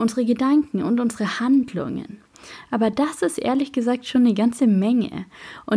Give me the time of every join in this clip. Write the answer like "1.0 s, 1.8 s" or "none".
none